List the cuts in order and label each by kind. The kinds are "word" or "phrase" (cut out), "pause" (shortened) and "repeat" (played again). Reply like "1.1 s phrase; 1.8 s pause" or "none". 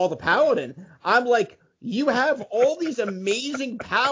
none